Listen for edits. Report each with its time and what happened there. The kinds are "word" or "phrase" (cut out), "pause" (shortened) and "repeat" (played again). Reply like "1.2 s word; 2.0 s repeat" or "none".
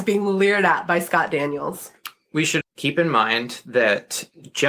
2.6 s word